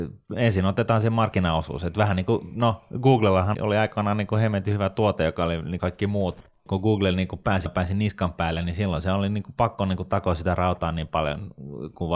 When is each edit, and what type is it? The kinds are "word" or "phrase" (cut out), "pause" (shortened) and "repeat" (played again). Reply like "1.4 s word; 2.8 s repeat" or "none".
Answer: 3.5 s word; 5.8 s word; 7.7 s word